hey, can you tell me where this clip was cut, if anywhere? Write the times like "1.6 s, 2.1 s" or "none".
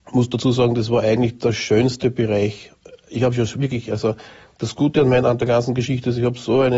none